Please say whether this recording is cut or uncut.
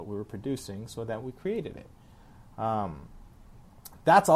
uncut